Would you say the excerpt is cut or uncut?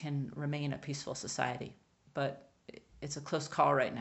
uncut